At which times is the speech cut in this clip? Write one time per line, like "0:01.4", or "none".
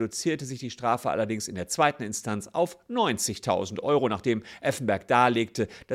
none